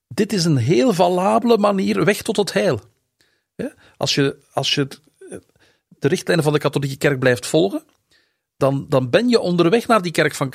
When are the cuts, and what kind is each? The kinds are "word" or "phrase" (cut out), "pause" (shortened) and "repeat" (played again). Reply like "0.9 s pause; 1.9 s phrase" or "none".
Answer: none